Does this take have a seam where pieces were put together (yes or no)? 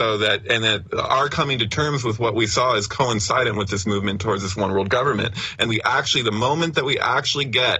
yes